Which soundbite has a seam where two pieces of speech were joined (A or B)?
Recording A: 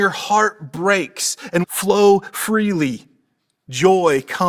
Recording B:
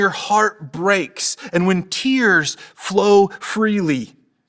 A